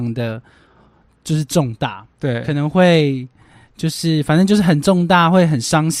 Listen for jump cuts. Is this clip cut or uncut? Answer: uncut